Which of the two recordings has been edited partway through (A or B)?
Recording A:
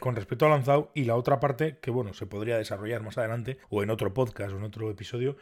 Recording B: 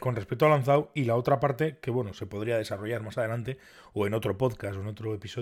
A